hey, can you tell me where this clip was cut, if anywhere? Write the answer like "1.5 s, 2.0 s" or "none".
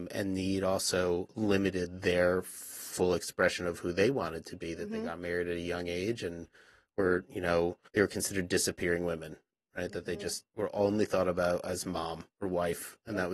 7.9 s, 12.3 s

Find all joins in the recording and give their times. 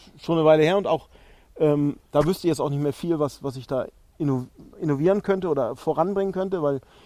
4.7 s

